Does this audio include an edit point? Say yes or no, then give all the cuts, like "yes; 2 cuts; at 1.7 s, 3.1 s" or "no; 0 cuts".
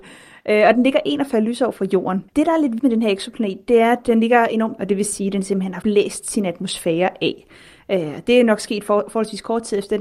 yes; 4 cuts; at 2.3 s, 2.8 s, 4.8 s, 5.8 s